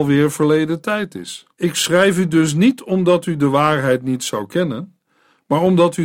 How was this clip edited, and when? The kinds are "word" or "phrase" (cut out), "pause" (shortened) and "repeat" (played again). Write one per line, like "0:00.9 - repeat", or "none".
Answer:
0:01.5 - pause